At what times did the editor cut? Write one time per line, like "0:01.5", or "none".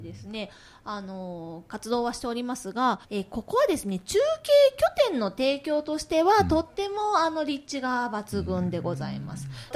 0:03.0